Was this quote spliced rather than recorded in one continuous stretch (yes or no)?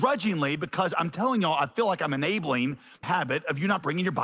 yes